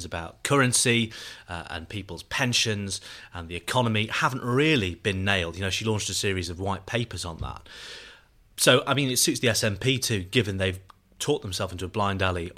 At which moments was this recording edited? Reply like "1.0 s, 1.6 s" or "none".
none

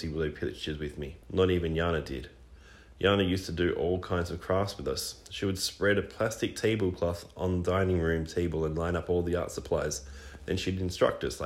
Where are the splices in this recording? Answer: 1.2 s

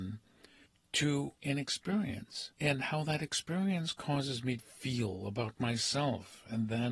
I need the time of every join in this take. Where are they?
4.6 s

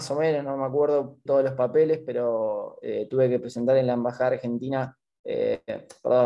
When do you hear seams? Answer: 1.3 s

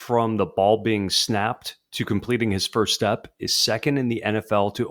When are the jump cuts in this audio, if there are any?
none

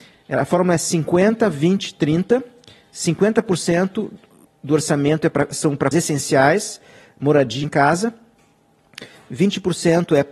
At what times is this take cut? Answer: 5.9 s, 7.6 s

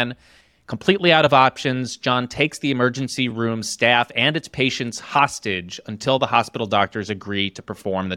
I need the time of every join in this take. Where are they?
none

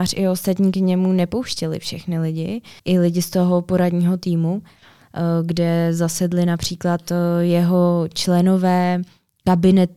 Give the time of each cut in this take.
2.8 s

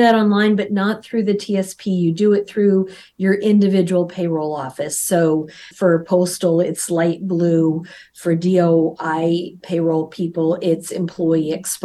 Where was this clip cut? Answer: 5.7 s, 9.6 s

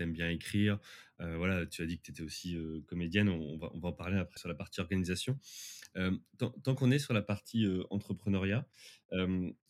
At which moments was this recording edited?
4.4 s

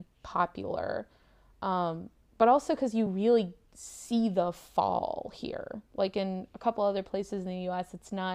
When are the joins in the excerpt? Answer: none

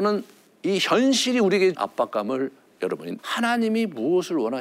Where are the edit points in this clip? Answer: 1.7 s, 3.2 s

